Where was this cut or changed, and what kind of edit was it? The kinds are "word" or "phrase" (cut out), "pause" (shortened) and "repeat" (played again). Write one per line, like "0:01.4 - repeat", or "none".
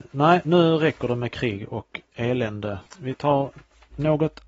0:02.9 - pause